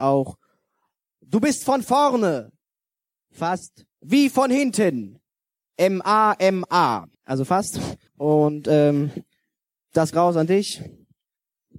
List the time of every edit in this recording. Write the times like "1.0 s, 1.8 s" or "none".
3.9 s, 7.1 s, 8.1 s, 10.1 s